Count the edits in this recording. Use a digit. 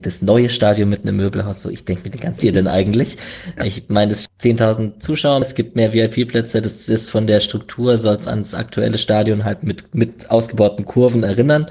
3